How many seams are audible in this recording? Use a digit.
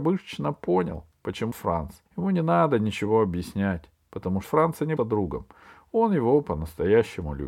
4